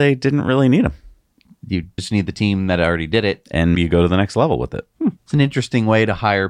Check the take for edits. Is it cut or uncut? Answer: cut